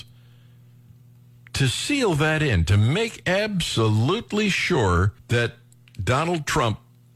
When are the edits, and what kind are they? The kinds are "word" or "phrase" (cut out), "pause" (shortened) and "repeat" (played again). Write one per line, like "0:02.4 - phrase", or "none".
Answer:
0:05.2 - pause